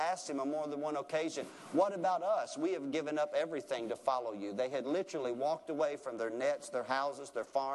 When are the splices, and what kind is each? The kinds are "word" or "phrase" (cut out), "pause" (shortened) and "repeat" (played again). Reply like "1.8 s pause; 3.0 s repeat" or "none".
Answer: none